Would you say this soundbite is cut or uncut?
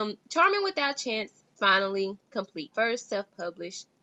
cut